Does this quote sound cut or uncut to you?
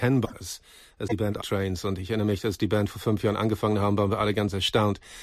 cut